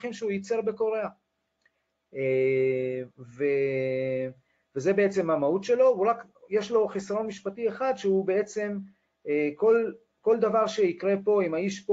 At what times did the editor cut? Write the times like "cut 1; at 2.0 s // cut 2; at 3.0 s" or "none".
cut 1; at 3.1 s